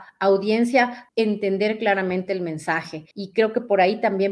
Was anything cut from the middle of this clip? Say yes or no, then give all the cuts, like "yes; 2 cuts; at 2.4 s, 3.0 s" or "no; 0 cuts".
yes; 2 cuts; at 1.1 s, 3.1 s